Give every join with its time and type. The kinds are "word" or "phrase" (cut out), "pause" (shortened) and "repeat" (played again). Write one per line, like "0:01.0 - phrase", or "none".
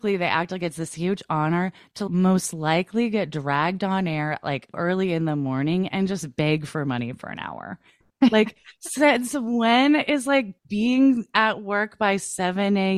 0:04.7 - word
0:10.6 - pause